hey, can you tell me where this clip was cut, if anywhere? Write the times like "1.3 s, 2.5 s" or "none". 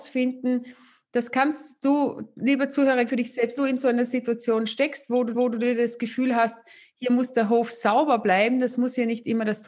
3.1 s, 3.6 s, 5.3 s